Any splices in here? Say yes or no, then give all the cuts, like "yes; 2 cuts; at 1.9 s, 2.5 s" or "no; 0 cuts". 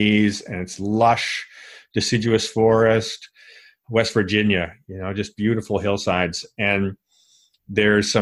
no; 0 cuts